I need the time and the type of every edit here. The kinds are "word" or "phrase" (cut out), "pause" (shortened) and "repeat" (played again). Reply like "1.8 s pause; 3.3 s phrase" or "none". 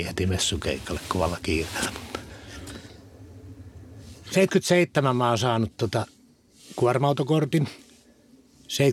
none